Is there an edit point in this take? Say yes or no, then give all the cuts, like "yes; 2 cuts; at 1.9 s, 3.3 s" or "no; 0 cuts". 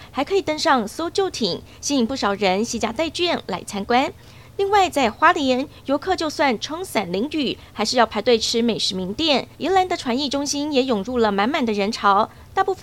yes; 1 cut; at 9.5 s